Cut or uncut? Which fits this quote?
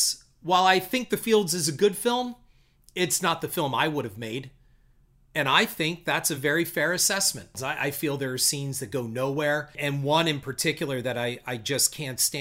uncut